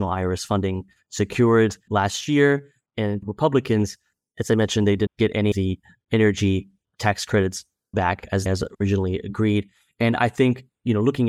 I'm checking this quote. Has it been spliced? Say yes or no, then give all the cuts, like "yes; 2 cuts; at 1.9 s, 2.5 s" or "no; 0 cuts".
yes; 6 cuts; at 1.9 s, 3.2 s, 5.1 s, 5.5 s, 7.9 s, 8.5 s